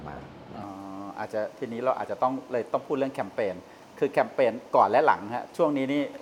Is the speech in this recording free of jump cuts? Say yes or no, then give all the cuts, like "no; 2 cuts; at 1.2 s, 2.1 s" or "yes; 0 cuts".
yes; 0 cuts